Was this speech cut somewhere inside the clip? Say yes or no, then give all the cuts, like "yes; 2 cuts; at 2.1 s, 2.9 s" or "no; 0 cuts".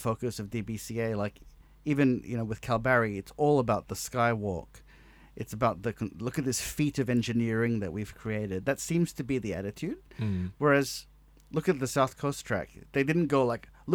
no; 0 cuts